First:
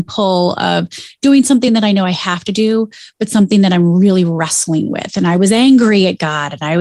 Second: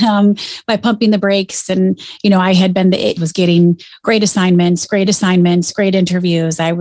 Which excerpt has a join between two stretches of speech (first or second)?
second